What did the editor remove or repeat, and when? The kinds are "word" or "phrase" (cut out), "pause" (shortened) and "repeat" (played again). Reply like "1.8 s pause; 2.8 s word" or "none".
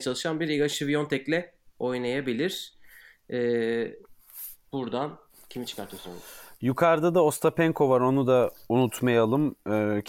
none